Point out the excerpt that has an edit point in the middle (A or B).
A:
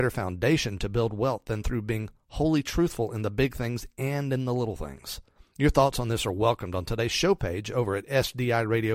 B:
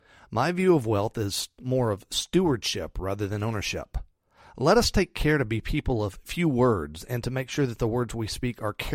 A